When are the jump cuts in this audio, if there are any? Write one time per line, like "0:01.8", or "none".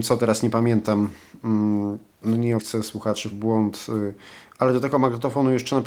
0:02.1
0:02.6
0:03.3